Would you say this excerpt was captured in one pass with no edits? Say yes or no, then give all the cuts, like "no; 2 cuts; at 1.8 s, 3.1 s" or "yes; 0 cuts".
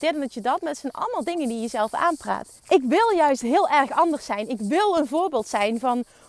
no; 1 cut; at 2.6 s